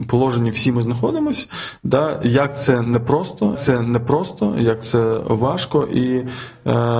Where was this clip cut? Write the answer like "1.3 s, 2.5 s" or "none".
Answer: 3.5 s